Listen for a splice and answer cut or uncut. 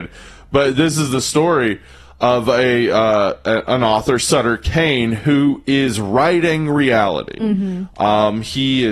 uncut